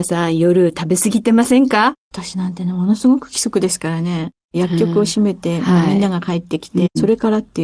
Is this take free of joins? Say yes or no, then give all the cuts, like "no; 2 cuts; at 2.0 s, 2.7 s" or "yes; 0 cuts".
no; 1 cut; at 2.0 s